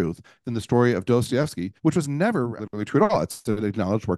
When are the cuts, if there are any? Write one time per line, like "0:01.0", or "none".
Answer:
0:01.8
0:02.6